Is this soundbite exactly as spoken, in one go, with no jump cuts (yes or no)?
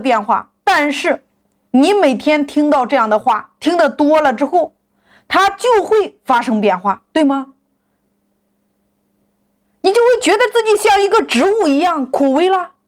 yes